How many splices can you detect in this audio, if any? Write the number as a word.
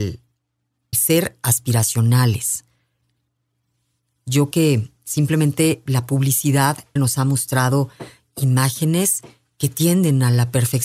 three